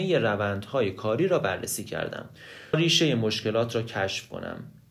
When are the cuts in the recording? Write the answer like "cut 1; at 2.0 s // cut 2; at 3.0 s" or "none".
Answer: cut 1; at 2.7 s